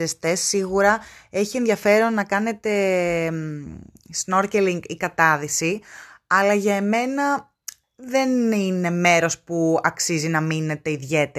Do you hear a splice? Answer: no; 0 cuts

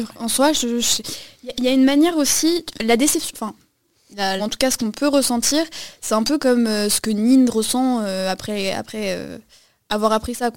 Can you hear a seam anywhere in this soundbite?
yes; 1 cut; at 4.4 s

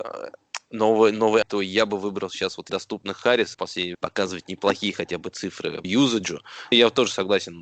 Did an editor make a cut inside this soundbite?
yes; 6 cuts; at 1.4 s, 2.7 s, 3.5 s, 3.9 s, 5.8 s, 6.7 s

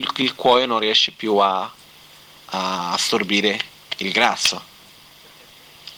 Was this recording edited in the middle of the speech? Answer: no; 0 cuts

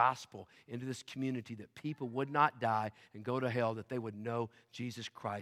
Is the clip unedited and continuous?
yes; 0 cuts

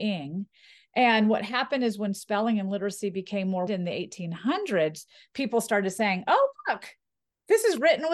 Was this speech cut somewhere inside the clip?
yes; 1 cut; at 3.7 s

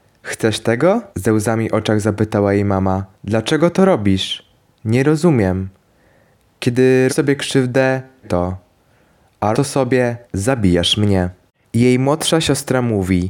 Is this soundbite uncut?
no; 6 cuts; at 1.1 s, 3.1 s, 7.1 s, 8.2 s, 9.5 s, 10.2 s

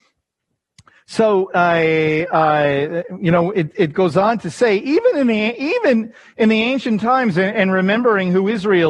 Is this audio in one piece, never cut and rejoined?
yes; 0 cuts

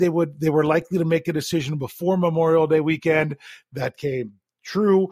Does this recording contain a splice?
no; 0 cuts

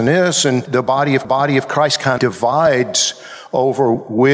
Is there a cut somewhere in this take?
yes; 2 cuts; at 1.2 s, 2.2 s

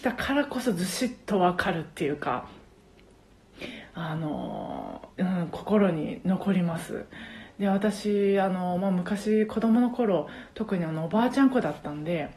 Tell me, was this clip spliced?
yes; 1 cut; at 5.1 s

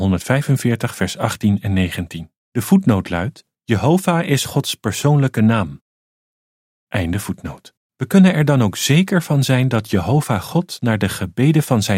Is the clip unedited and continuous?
no; 3 cuts; at 2.4 s, 3.5 s, 7.8 s

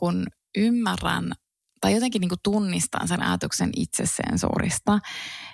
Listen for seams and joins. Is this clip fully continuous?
yes; 0 cuts

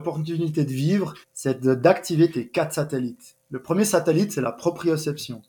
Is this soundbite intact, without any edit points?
no; 1 cut; at 1.2 s

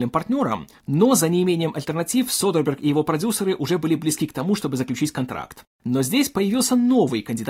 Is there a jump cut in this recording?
yes; 1 cut; at 5.7 s

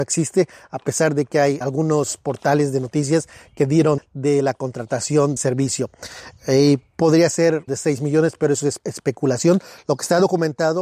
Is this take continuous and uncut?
no; 5 cuts; at 1.6 s, 4.0 s, 5.4 s, 7.7 s, 8.8 s

